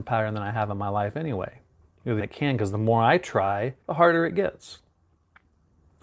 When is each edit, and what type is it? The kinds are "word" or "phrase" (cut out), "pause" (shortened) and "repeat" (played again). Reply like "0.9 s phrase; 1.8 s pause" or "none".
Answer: 1.8 s pause; 2.2 s phrase; 3.8 s pause